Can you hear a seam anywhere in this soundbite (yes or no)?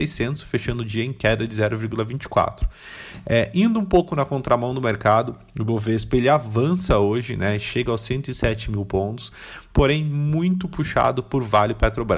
no